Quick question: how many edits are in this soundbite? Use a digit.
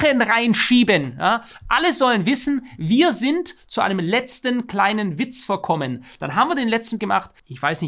1